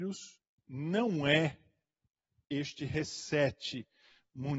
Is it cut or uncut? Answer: uncut